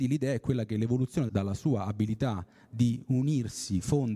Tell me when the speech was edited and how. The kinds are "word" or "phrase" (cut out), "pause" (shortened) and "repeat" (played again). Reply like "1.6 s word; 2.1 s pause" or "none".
1.3 s phrase